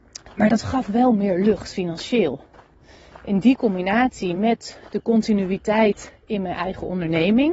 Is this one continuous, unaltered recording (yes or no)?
yes